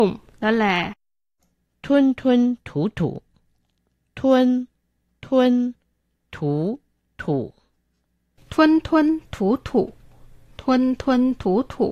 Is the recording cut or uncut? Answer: uncut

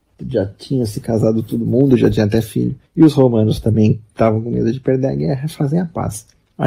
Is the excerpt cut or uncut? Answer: cut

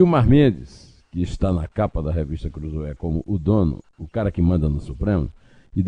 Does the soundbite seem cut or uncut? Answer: uncut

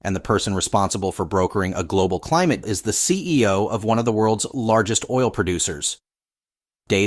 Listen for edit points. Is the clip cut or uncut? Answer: cut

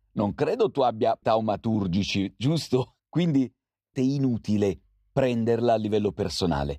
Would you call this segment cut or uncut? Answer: cut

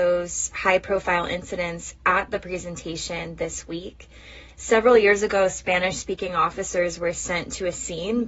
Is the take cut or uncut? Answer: uncut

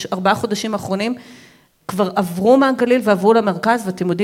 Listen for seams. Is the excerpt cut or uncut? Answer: uncut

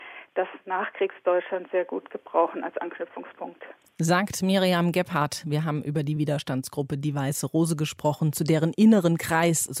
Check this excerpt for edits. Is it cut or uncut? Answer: uncut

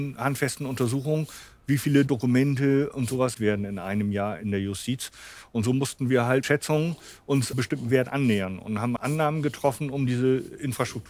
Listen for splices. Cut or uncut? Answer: cut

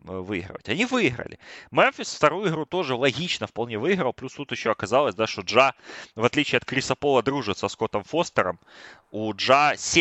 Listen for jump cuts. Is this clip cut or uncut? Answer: uncut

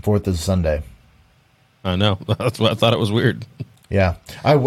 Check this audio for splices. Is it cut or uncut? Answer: uncut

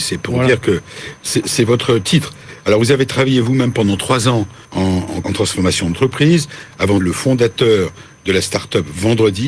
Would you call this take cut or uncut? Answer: cut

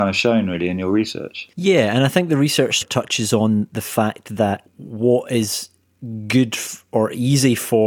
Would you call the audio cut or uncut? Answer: cut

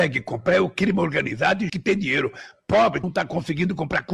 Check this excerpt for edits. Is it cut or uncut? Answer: cut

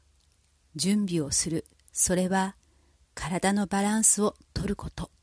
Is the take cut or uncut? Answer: uncut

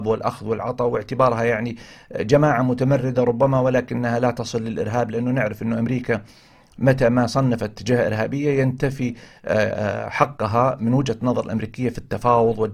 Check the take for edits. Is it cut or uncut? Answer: uncut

